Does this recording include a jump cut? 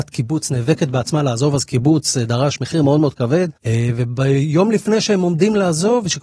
yes; 1 cut; at 3.6 s

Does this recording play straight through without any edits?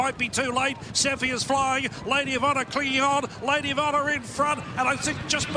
yes; 0 cuts

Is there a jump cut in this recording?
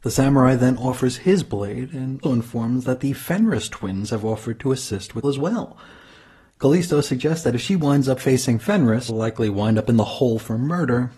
yes; 3 cuts; at 2.2 s, 5.2 s, 9.1 s

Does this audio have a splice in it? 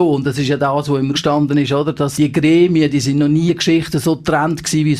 yes; 3 cuts; at 1.1 s, 2.1 s, 3.5 s

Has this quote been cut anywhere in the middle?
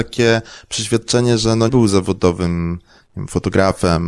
yes; 1 cut; at 1.7 s

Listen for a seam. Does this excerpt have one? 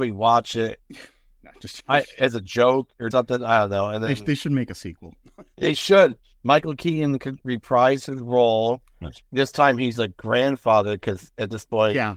yes; 2 cuts; at 1.8 s, 3.1 s

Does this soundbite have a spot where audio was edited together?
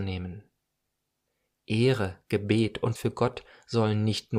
yes; 1 cut; at 3.0 s

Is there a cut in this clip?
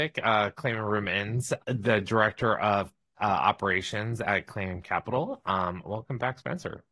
yes; 2 cuts; at 1.6 s, 3.2 s

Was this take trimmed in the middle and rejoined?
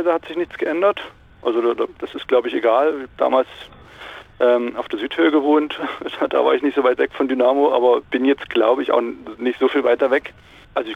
no; 0 cuts

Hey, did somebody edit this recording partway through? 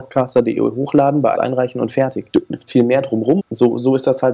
yes; 4 cuts; at 1.4 s, 2.3 s, 2.7 s, 3.4 s

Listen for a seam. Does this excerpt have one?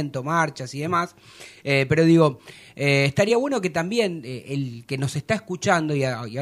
no; 0 cuts

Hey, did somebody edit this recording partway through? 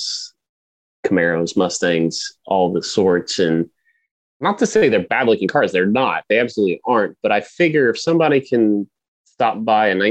no; 0 cuts

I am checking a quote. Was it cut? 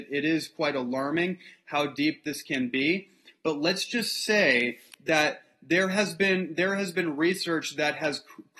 no; 0 cuts

